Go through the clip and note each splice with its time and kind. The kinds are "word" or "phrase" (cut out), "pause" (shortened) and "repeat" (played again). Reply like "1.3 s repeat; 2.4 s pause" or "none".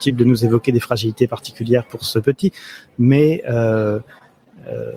none